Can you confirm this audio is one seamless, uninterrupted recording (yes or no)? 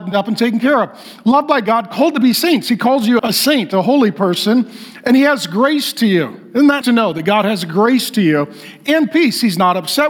no